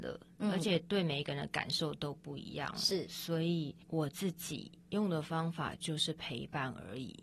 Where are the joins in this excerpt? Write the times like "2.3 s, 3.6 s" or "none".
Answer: 3.8 s, 4.8 s